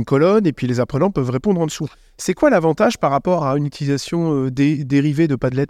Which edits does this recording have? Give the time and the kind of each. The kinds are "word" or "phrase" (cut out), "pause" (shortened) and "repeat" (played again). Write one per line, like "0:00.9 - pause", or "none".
none